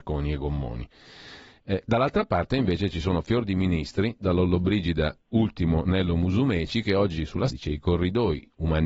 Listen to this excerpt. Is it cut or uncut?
cut